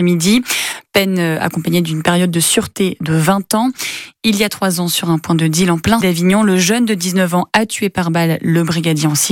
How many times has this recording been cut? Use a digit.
1